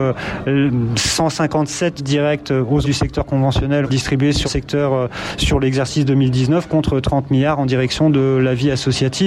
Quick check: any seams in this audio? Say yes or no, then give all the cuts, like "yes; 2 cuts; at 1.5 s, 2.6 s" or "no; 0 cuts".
yes; 4 cuts; at 2.0 s, 2.8 s, 3.8 s, 4.5 s